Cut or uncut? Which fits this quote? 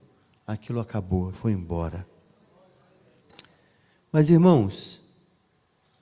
cut